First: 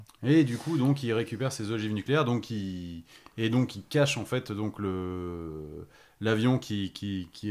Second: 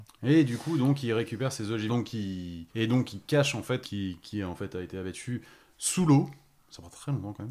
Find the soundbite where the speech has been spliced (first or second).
second